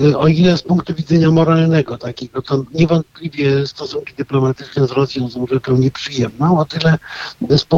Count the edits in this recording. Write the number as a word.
zero